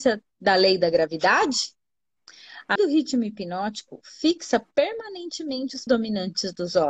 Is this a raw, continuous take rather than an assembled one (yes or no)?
no